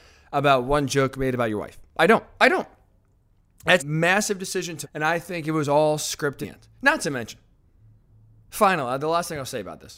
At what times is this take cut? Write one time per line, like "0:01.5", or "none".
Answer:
0:03.8
0:04.8
0:06.4